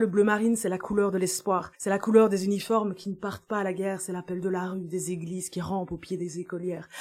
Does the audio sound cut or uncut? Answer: cut